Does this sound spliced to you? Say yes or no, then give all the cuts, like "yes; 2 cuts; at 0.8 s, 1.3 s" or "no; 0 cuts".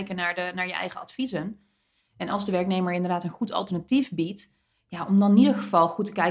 no; 0 cuts